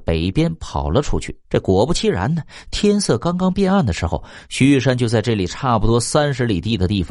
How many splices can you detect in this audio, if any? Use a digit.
1